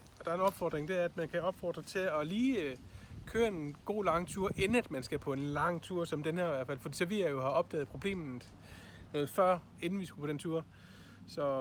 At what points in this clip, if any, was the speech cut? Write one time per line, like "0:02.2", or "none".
none